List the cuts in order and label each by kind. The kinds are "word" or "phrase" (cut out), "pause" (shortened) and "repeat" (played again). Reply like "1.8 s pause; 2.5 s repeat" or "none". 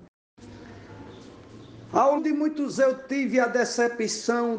2.2 s word; 2.7 s word